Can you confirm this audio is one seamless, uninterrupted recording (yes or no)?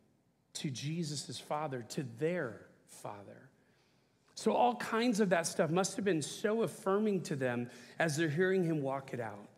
yes